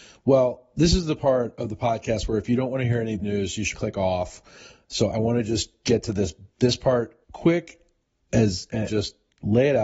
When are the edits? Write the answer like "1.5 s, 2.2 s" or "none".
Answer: 3.2 s, 3.7 s, 6.5 s, 7.2 s, 8.9 s